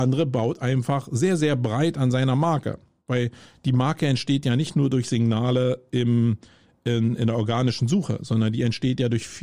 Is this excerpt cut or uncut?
uncut